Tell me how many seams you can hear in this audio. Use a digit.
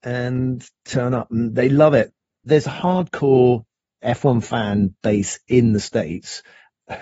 0